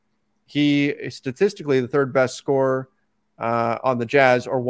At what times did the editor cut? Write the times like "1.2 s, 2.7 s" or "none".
none